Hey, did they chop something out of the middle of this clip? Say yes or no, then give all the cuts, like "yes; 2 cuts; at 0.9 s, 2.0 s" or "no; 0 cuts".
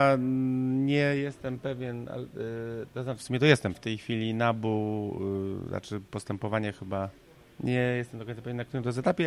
yes; 2 cuts; at 3.2 s, 3.7 s